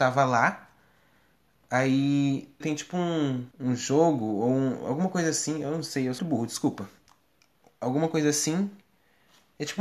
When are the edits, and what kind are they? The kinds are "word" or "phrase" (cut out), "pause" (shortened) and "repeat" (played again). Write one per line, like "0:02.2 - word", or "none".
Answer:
0:02.6 - phrase
0:03.5 - pause
0:06.2 - word